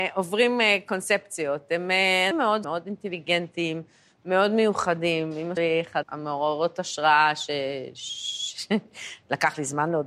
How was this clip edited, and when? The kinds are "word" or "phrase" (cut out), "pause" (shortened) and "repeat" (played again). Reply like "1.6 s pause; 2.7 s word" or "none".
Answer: 2.3 s word; 2.6 s word; 5.6 s word; 6.0 s word